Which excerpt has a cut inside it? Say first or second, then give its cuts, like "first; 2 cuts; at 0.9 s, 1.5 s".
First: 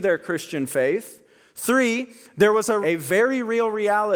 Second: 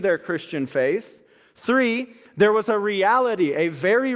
first; 1 cut; at 2.8 s